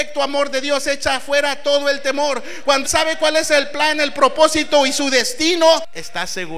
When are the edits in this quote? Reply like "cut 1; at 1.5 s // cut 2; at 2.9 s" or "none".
cut 1; at 2.8 s